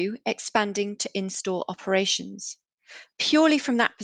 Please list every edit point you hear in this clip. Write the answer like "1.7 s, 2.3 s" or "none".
none